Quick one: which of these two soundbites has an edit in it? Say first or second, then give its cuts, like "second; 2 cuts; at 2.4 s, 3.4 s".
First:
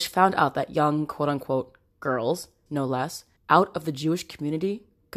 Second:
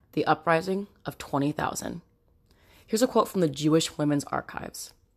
first; 2 cuts; at 2.7 s, 3.4 s